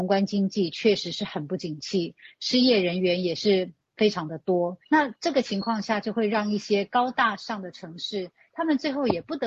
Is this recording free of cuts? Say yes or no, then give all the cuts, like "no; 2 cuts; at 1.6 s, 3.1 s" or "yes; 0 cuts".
no; 1 cut; at 4.8 s